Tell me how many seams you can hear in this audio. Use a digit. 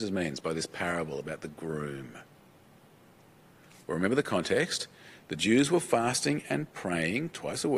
0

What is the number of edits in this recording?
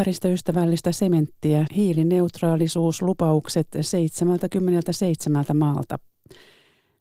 1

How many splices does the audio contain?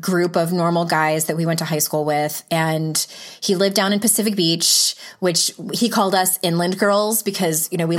0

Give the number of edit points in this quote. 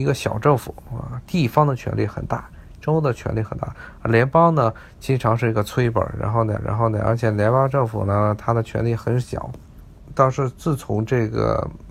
1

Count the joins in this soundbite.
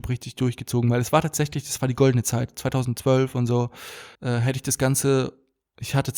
1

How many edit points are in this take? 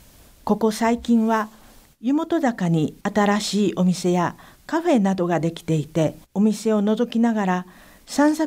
2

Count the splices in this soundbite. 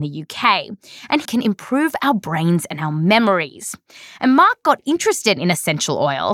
1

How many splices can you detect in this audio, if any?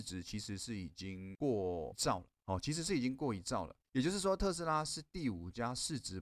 0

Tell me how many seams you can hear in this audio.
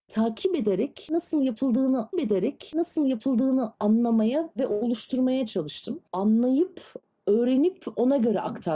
1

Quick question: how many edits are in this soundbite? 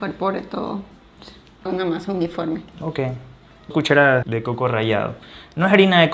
3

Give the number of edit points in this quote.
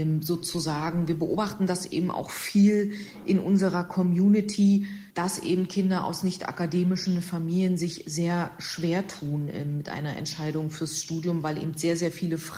1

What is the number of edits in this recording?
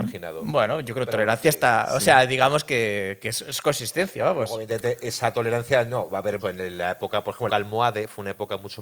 2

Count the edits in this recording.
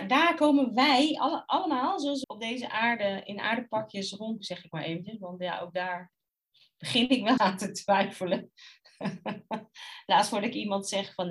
4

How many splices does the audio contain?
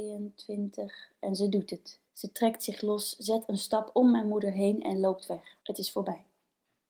2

